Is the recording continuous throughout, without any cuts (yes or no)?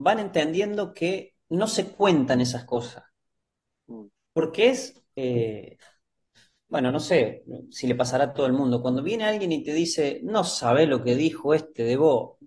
yes